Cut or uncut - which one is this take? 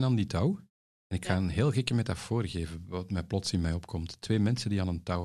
uncut